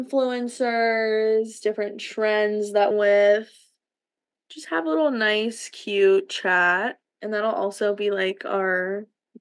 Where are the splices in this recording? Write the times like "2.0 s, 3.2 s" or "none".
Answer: 2.9 s